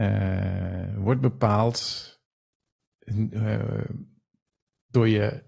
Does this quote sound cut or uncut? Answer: uncut